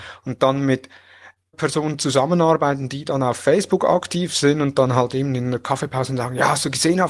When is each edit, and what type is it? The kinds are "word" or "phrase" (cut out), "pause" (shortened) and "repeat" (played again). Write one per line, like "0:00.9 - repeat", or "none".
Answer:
0:01.5 - phrase